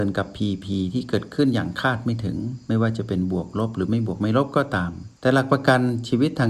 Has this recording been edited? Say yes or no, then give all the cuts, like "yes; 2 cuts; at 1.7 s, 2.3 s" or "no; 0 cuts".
yes; 1 cut; at 5.2 s